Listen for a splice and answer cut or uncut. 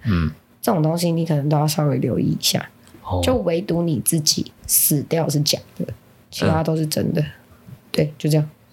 uncut